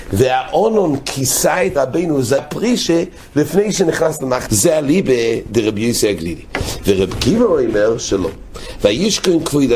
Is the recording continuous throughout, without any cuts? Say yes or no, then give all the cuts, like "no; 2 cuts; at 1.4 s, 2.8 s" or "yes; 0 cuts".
no; 3 cuts; at 1.8 s, 2.4 s, 4.5 s